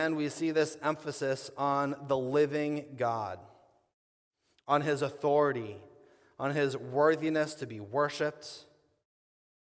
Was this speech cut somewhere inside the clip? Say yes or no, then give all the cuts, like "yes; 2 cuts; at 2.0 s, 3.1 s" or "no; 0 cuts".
no; 0 cuts